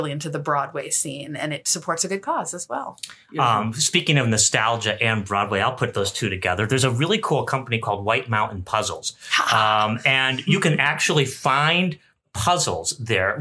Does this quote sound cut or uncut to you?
uncut